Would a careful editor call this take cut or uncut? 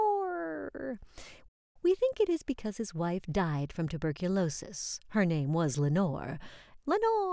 uncut